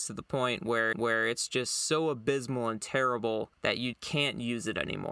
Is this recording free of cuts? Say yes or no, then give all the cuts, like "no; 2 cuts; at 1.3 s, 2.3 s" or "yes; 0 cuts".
no; 3 cuts; at 0.9 s, 3.5 s, 3.9 s